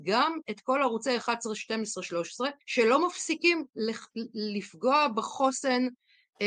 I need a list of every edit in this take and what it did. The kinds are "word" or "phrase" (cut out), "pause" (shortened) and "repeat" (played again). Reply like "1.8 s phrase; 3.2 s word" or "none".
2.6 s pause